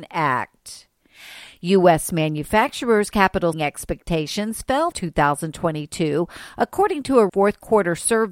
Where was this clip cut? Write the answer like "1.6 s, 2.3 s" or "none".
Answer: 3.5 s, 4.9 s, 7.3 s